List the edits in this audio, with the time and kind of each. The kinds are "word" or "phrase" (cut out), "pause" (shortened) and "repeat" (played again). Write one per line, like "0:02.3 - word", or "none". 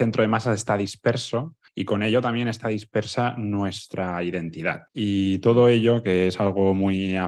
0:01.7 - pause
0:04.9 - pause